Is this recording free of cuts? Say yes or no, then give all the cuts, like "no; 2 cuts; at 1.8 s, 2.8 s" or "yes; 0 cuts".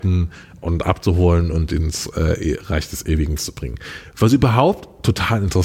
no; 1 cut; at 3.4 s